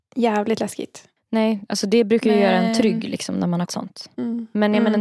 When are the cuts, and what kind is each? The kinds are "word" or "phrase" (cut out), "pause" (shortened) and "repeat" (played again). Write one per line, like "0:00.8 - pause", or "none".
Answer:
0:03.7 - word

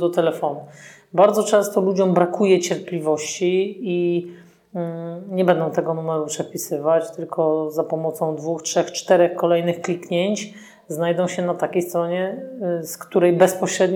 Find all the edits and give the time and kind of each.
none

